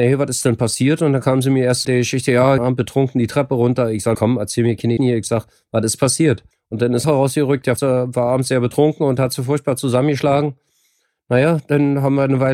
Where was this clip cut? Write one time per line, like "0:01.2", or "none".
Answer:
0:01.8
0:02.6
0:04.1
0:05.0
0:06.5
0:07.0
0:07.8